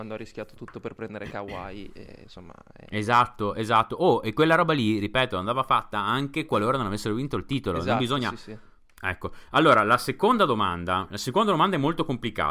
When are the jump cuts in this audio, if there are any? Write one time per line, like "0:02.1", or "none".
none